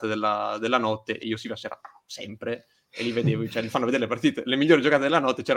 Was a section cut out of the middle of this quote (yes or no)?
yes